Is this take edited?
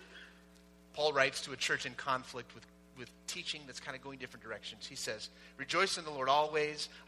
no; 0 cuts

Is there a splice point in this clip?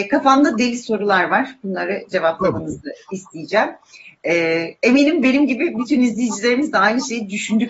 no; 0 cuts

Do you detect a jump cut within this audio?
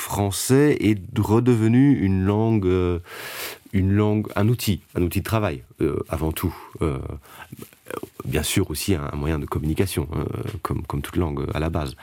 no; 0 cuts

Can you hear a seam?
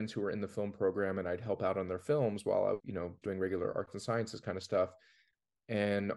yes; 2 cuts; at 2.8 s, 3.2 s

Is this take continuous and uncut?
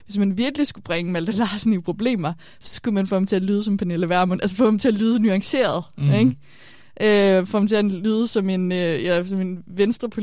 yes; 0 cuts

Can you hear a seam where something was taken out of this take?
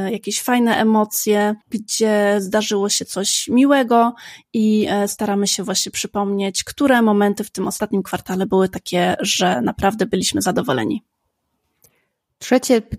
yes; 1 cut; at 1.6 s

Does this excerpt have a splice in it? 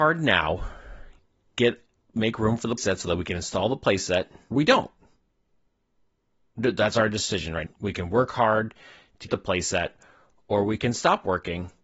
yes; 5 cuts; at 1.5 s, 2.8 s, 4.5 s, 7.7 s, 9.3 s

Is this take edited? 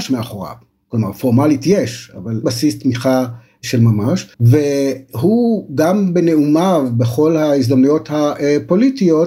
yes; 2 cuts; at 2.4 s, 4.3 s

